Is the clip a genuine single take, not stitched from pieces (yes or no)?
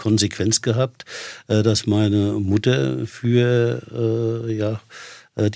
yes